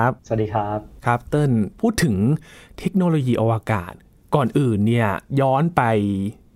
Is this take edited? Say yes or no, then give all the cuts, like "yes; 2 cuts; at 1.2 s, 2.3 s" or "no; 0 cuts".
no; 0 cuts